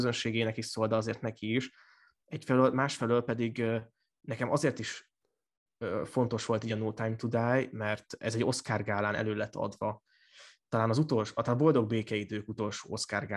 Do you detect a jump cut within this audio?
no; 0 cuts

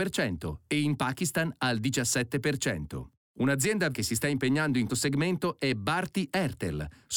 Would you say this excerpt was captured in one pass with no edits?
no; 2 cuts; at 3.9 s, 4.9 s

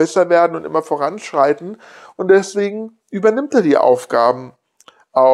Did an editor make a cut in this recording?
no; 0 cuts

